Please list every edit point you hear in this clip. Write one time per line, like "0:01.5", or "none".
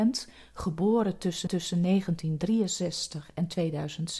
0:01.5